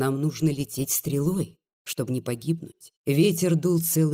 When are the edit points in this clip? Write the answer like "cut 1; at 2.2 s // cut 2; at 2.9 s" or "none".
cut 1; at 3.0 s